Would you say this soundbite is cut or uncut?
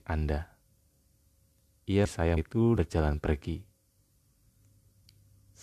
cut